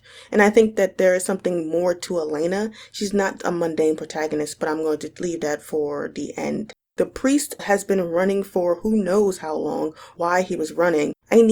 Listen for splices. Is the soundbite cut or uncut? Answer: cut